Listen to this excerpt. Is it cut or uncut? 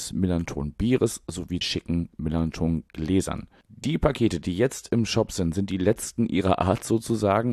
cut